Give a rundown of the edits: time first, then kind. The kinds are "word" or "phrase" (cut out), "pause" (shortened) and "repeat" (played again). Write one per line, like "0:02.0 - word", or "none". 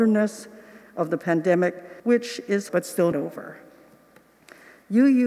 0:02.0 - pause
0:02.7 - phrase
0:03.1 - word